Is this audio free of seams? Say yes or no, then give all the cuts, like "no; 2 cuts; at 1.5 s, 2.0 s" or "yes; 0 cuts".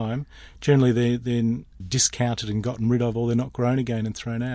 no; 1 cut; at 1.8 s